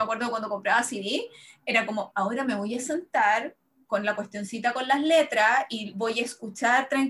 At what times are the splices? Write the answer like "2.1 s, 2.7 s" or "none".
2.1 s